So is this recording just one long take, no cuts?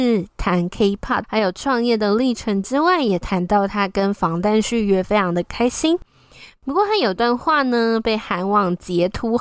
no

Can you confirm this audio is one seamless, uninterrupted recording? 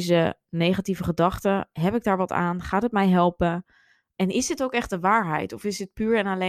yes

